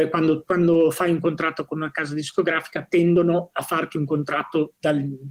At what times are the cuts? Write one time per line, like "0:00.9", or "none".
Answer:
none